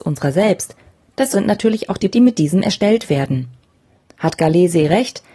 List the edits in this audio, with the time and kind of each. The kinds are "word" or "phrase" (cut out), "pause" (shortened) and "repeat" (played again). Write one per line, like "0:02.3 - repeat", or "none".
0:01.3 - word
0:02.1 - word

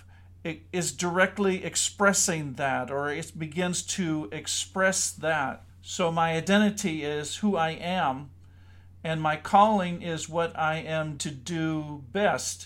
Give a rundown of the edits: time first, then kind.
0:05.7 - pause
0:11.2 - word

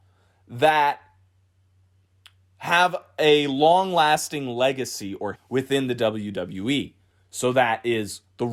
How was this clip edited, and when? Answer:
0:05.3 - word

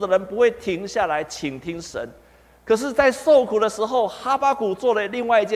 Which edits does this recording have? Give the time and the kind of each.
none

